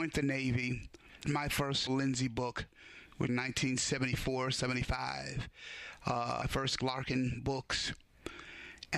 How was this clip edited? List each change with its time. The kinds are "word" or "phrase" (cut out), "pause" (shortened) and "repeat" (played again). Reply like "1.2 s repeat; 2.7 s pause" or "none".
1.2 s word; 1.9 s word; 3.3 s word; 6.4 s word; 6.8 s word